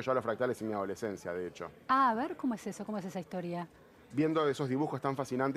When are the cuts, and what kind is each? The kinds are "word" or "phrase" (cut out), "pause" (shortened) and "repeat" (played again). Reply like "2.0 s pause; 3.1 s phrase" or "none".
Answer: none